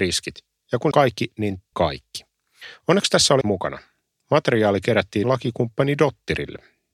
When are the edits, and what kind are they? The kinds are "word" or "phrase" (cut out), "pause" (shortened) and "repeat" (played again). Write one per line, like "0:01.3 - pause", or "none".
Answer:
0:00.9 - word
0:01.7 - word
0:03.4 - word
0:05.2 - word